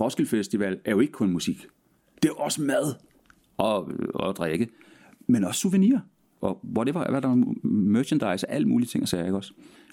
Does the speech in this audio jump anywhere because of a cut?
no; 0 cuts

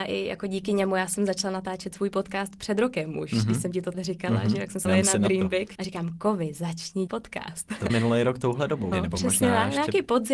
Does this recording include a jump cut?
yes; 6 cuts; at 3.9 s, 4.8 s, 5.7 s, 7.1 s, 7.9 s, 8.9 s

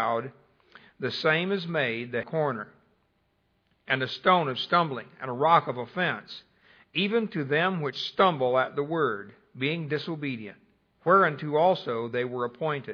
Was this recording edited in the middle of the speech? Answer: yes; 1 cut; at 2.2 s

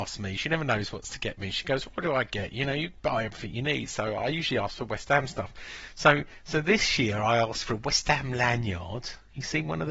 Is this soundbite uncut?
yes; 0 cuts

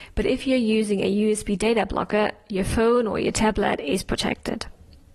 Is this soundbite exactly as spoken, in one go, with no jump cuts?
yes; 0 cuts

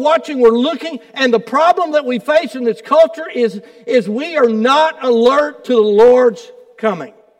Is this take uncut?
yes; 0 cuts

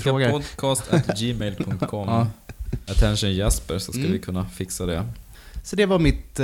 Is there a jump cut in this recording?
no; 0 cuts

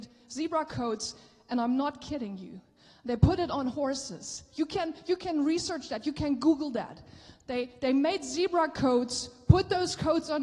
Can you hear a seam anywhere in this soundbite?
no; 0 cuts

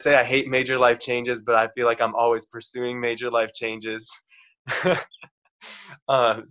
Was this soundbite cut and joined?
no; 0 cuts

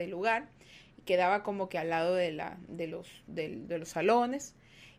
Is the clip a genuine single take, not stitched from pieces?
yes; 0 cuts

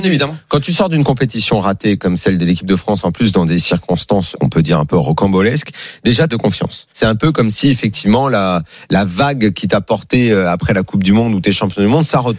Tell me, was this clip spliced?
yes; 3 cuts; at 4.3 s, 6.3 s, 6.9 s

